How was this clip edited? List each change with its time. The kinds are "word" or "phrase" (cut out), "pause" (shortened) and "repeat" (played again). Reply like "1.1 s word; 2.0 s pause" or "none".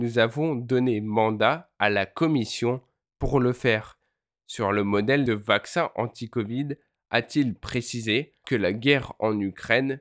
5.3 s phrase; 8.4 s word